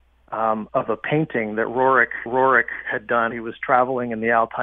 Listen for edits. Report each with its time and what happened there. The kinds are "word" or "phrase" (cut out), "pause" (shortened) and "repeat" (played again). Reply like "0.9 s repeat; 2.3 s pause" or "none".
2.3 s repeat; 3.3 s word